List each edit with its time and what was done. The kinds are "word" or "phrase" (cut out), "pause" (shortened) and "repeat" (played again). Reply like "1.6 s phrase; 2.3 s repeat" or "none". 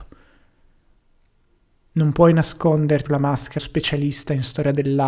3.1 s word; 3.6 s word